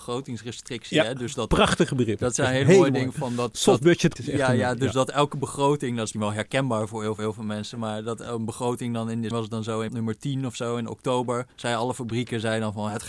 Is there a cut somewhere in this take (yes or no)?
yes